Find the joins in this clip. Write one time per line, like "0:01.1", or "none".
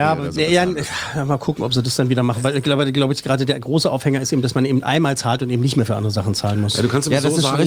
none

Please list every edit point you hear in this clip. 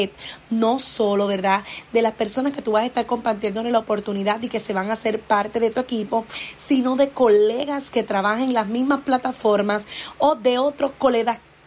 none

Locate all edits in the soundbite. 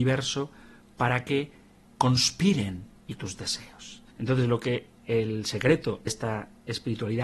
0:03.2
0:04.1
0:05.0
0:06.1

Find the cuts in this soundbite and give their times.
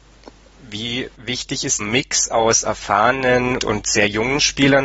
0:01.8
0:03.6

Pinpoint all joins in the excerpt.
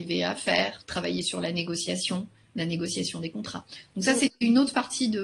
none

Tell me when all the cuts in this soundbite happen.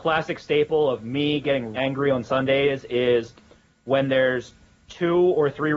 0:01.7

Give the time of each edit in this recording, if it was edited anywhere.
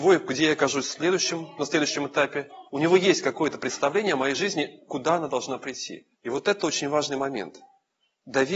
0:02.7
0:06.1

